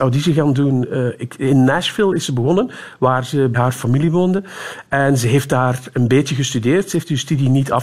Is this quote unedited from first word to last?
no; 1 cut; at 3.5 s

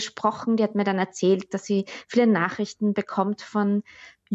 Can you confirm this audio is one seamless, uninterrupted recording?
yes; 0 cuts

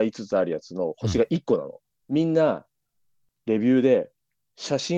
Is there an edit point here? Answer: yes; 1 cut; at 2.0 s

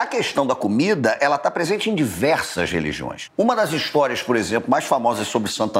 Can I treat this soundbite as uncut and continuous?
yes; 0 cuts

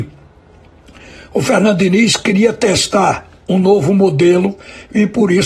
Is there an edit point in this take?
no; 0 cuts

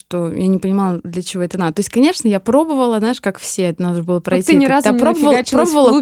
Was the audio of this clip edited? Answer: no; 0 cuts

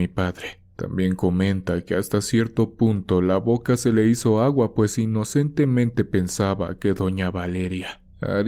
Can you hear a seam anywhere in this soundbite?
no; 0 cuts

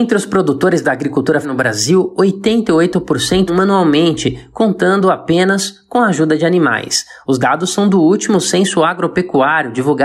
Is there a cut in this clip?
yes; 2 cuts; at 1.4 s, 3.5 s

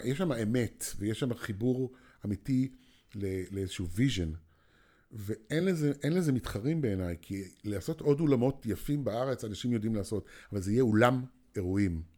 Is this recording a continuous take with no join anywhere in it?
yes; 0 cuts

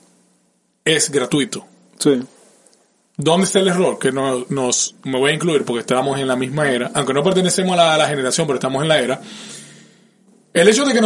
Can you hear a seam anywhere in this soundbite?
no; 0 cuts

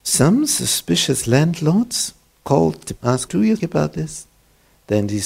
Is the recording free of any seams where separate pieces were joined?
no; 4 cuts; at 2.3 s, 3.0 s, 3.3 s, 3.6 s

